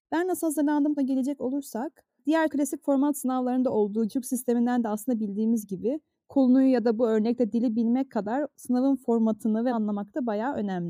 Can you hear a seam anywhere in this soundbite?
yes; 4 cuts; at 1.0 s, 2.5 s, 4.1 s, 9.7 s

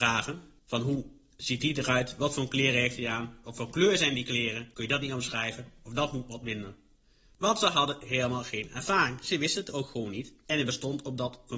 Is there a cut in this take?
no; 0 cuts

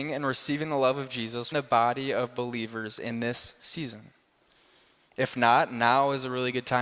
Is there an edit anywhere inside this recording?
yes; 1 cut; at 1.5 s

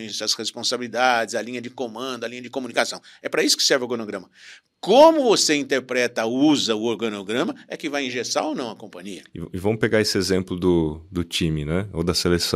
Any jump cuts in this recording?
no; 0 cuts

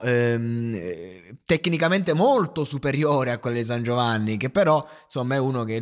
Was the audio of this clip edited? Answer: no; 0 cuts

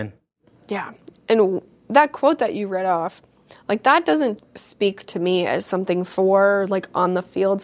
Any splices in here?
yes; 2 cuts; at 1.2 s, 4.4 s

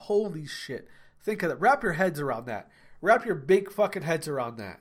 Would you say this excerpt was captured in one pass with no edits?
yes; 0 cuts

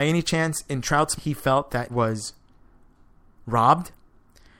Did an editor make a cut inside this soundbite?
yes; 2 cuts; at 1.2 s, 1.9 s

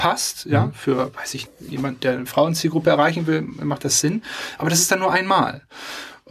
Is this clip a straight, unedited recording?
no; 1 cut; at 1.5 s

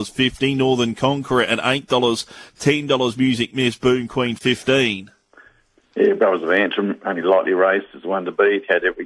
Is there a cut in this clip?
no; 0 cuts

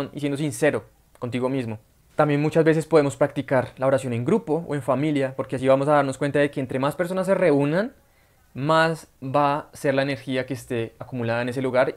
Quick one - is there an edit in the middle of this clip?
no; 0 cuts

